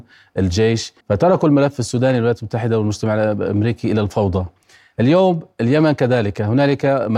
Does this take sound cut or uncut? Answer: cut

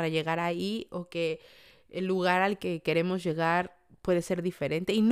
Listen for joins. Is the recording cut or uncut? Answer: uncut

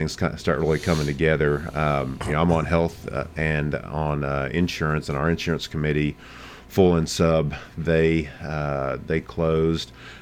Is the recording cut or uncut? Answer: uncut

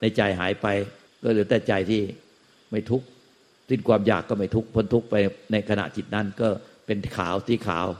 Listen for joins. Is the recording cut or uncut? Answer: cut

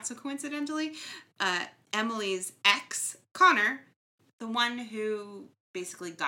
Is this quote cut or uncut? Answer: uncut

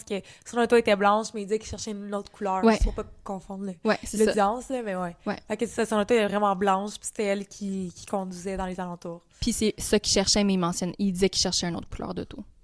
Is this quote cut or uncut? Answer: uncut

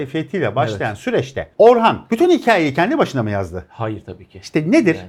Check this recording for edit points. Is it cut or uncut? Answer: uncut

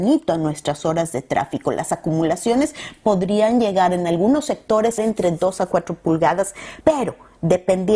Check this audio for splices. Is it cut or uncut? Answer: cut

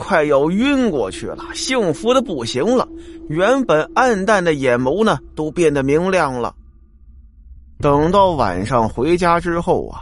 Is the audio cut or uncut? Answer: uncut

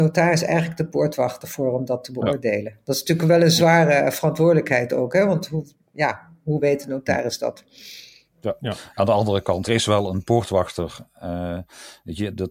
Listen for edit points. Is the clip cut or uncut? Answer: cut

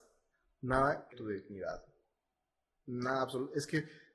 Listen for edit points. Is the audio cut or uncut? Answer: cut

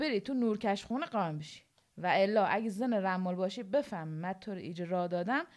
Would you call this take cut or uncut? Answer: uncut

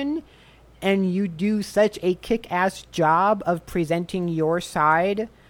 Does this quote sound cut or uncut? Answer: uncut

